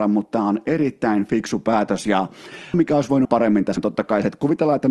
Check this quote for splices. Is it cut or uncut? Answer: cut